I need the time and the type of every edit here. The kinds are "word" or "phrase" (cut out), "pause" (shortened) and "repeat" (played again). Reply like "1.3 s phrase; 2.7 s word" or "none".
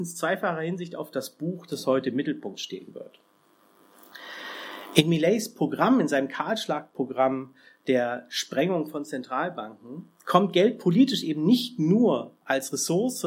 none